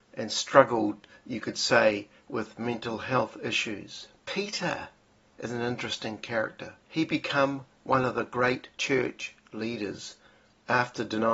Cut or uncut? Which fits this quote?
cut